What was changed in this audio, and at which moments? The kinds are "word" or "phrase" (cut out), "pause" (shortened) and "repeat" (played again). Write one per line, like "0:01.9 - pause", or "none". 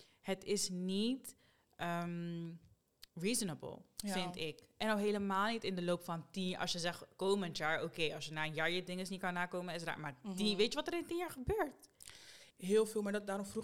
0:03.1 - pause
0:12.5 - pause